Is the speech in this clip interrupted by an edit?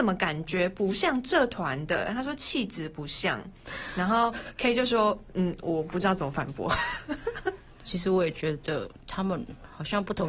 no; 0 cuts

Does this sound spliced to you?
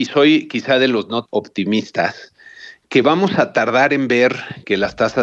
yes; 1 cut; at 1.3 s

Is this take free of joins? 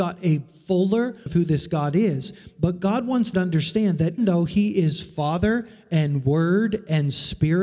no; 3 cuts; at 1.3 s, 3.3 s, 4.2 s

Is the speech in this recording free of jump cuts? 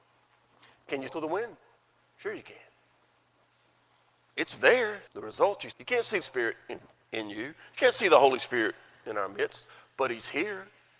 no; 5 cuts; at 1.1 s, 1.8 s, 5.1 s, 5.7 s, 6.2 s

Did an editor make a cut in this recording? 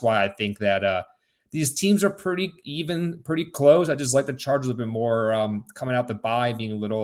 no; 0 cuts

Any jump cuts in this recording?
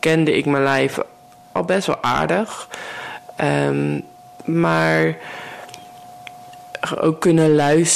no; 0 cuts

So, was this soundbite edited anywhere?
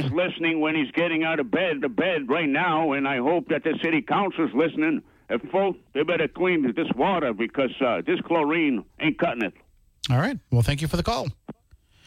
yes; 5 cuts; at 1.8 s, 5.4 s, 5.9 s, 6.7 s, 8.9 s

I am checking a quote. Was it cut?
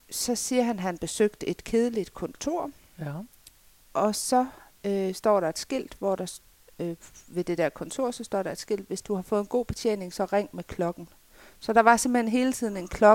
no; 0 cuts

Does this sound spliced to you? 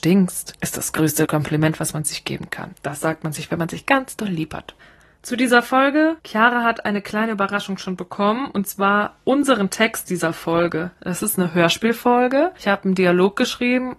no; 0 cuts

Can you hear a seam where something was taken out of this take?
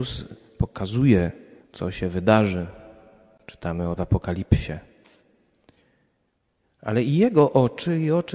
yes; 2 cuts; at 1.6 s, 4.0 s

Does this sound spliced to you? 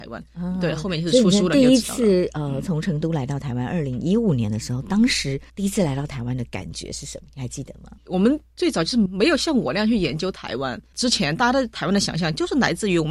yes; 2 cuts; at 5.5 s, 8.0 s

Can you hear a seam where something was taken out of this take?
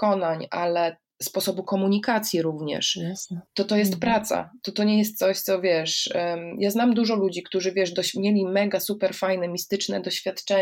yes; 1 cut; at 3.5 s

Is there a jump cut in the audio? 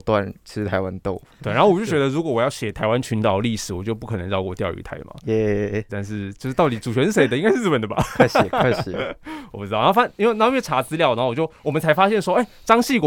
yes; 1 cut; at 5.9 s

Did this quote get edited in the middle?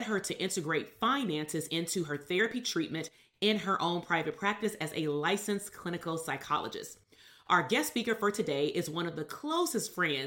no; 0 cuts

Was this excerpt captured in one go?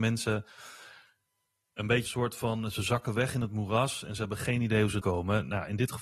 no; 2 cuts; at 2.1 s, 5.0 s

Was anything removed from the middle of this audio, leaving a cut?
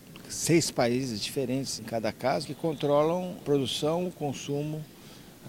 yes; 3 cuts; at 1.8 s, 2.4 s, 3.4 s

